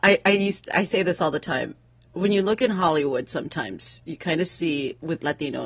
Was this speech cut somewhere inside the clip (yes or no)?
no